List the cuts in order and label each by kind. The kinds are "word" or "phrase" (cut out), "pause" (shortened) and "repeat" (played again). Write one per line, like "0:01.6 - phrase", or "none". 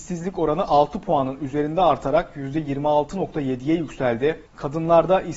0:04.5 - pause